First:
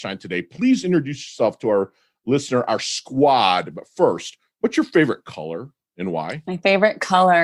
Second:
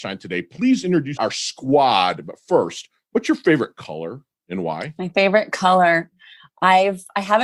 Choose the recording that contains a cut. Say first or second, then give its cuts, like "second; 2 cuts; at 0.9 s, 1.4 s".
second; 1 cut; at 1.2 s